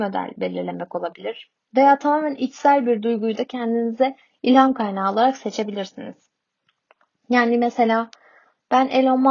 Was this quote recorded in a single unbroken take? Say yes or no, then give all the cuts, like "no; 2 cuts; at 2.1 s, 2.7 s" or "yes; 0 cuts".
yes; 0 cuts